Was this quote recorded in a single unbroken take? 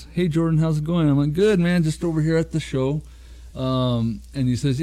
yes; 0 cuts

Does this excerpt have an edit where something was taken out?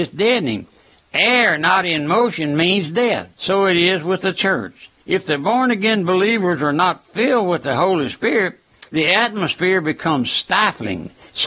yes; 3 cuts; at 3.3 s, 5.0 s, 8.9 s

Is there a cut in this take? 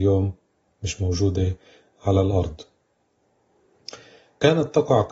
no; 0 cuts

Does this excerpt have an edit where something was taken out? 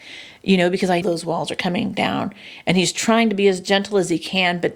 yes; 1 cut; at 1.0 s

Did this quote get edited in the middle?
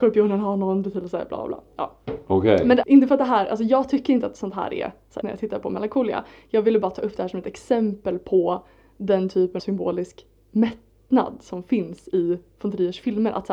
yes; 3 cuts; at 2.8 s, 5.2 s, 9.6 s

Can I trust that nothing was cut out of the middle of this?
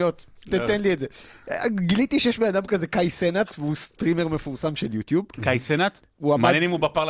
yes; 0 cuts

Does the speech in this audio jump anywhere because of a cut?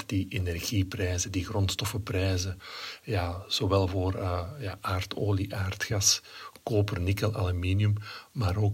no; 0 cuts

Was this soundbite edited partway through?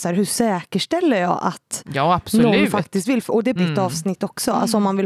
yes; 1 cut; at 3.6 s

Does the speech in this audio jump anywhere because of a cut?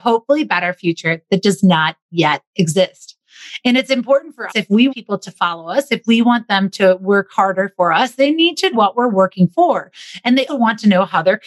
yes; 4 cuts; at 4.5 s, 4.9 s, 8.7 s, 10.5 s

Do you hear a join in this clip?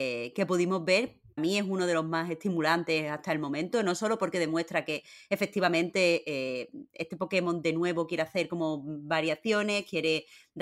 yes; 1 cut; at 1.4 s

